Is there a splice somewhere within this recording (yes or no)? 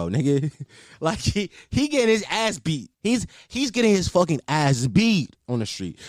yes